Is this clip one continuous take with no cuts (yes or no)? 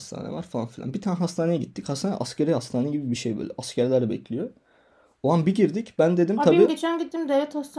yes